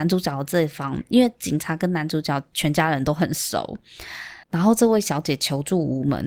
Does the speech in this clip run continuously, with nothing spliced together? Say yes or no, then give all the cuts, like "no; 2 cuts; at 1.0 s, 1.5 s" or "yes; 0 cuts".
no; 1 cut; at 4.4 s